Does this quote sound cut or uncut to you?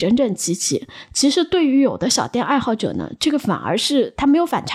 uncut